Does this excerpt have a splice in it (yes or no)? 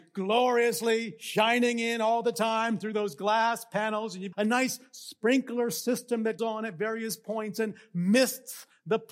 yes